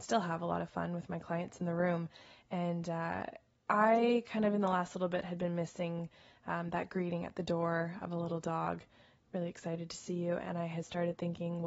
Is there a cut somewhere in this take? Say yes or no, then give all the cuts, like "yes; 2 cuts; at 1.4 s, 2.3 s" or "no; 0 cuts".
no; 0 cuts